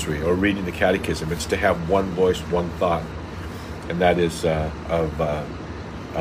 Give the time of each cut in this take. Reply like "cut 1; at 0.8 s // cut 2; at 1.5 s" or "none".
cut 1; at 4.8 s